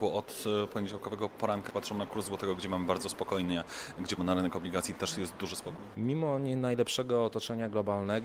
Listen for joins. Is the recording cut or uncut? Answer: cut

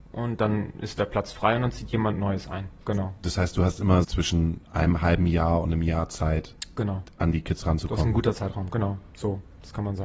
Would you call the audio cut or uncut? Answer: cut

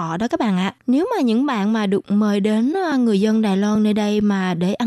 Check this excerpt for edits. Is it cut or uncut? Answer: uncut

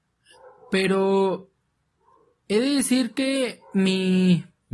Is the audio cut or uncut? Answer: uncut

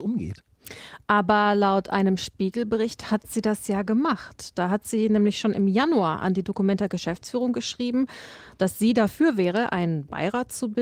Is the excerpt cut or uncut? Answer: uncut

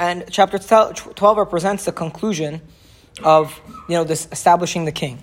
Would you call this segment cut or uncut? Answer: uncut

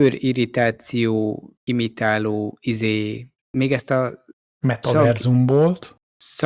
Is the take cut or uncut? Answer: cut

